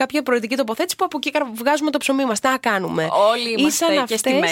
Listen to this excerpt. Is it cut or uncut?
uncut